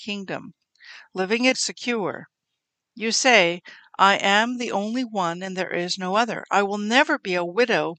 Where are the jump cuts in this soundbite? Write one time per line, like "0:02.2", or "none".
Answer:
0:01.5